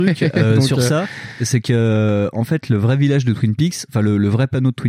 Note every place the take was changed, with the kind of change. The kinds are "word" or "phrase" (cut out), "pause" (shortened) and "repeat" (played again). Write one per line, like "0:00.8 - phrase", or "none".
none